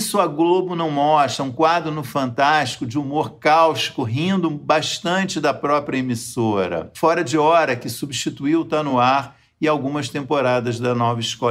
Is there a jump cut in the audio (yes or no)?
no